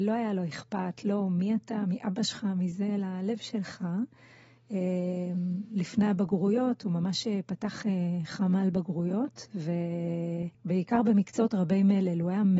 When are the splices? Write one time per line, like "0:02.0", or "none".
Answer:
0:10.5